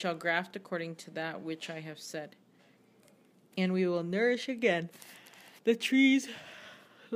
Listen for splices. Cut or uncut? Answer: cut